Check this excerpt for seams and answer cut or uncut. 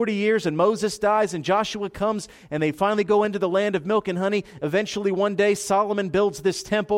uncut